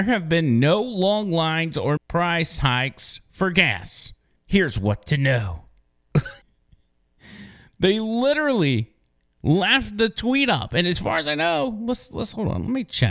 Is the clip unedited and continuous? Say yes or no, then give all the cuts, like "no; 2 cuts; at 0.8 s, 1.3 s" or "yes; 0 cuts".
no; 3 cuts; at 2.0 s, 4.4 s, 6.4 s